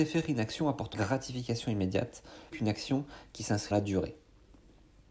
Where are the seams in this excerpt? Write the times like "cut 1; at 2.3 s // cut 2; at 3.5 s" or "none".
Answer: cut 1; at 0.9 s // cut 2; at 2.5 s // cut 3; at 3.7 s